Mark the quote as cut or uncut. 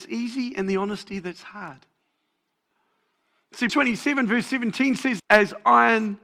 cut